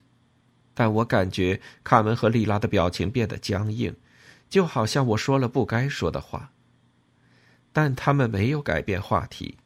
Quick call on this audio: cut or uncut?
uncut